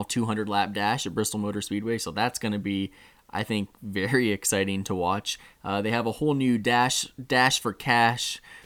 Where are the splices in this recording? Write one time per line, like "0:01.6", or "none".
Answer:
none

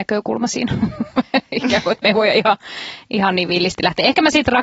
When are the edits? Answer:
none

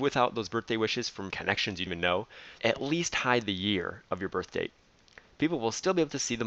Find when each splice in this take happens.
0:01.3
0:01.9
0:02.6

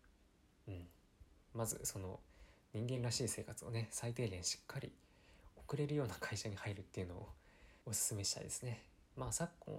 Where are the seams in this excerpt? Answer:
0:07.8

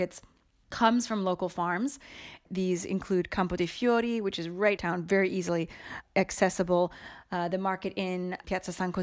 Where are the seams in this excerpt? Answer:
0:04.8

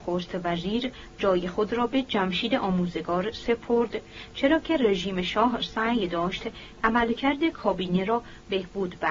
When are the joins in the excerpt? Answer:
none

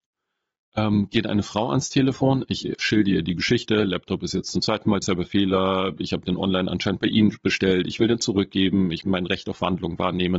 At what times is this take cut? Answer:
0:05.0
0:09.0

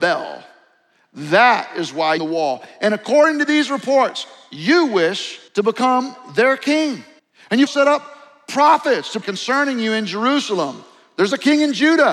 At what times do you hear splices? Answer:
0:02.2
0:05.5
0:07.2
0:07.7
0:09.2

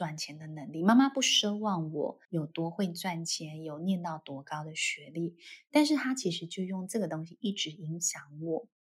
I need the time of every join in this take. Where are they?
0:02.2

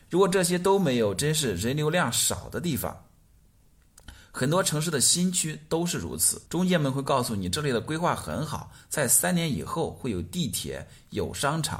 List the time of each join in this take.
0:06.5

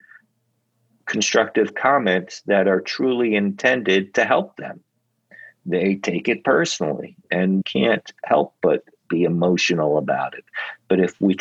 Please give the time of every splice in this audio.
0:07.6

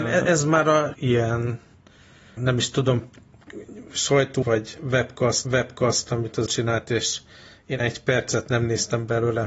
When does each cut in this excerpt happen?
0:00.9
0:02.4
0:04.4
0:05.4
0:06.5
0:07.8

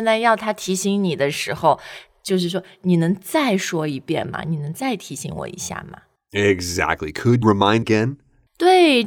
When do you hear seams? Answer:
0:07.4
0:07.8

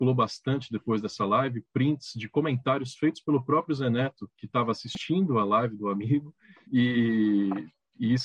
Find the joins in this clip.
none

